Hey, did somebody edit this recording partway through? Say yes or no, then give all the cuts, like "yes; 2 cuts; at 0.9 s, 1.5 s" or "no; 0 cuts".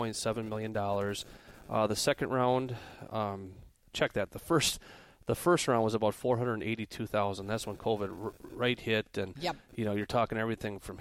no; 0 cuts